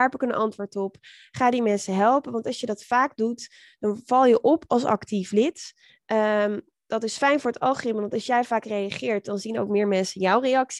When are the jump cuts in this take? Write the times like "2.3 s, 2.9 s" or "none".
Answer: none